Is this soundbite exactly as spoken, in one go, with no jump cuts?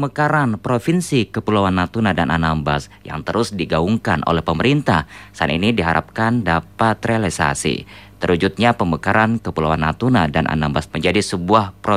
no; 1 cut; at 10.9 s

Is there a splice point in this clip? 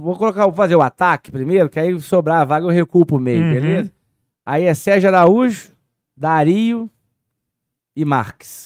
no; 0 cuts

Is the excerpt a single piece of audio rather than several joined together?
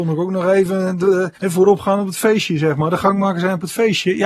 no; 1 cut; at 1.3 s

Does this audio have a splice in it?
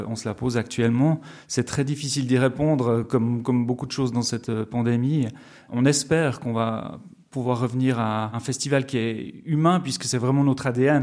no; 0 cuts

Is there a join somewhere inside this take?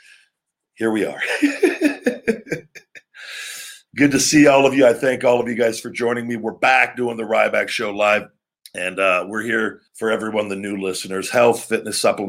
yes; 2 cuts; at 8.5 s, 9.9 s

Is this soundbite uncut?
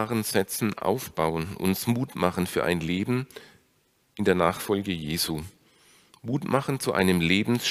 yes; 0 cuts

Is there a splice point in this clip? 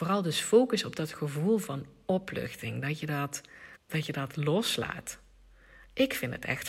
yes; 1 cut; at 3.7 s

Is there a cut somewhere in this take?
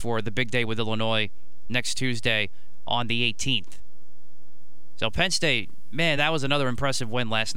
no; 0 cuts

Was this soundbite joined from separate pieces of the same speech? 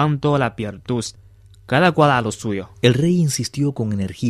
no; 0 cuts

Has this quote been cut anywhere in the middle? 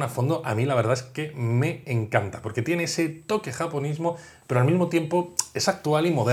no; 0 cuts

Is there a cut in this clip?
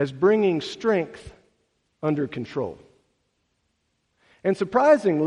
no; 0 cuts

